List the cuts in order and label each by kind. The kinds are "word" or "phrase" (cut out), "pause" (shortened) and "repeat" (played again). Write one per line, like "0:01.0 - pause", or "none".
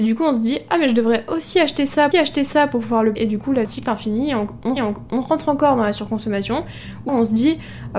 0:02.1 - repeat
0:03.2 - word
0:03.7 - phrase
0:04.8 - repeat
0:07.1 - word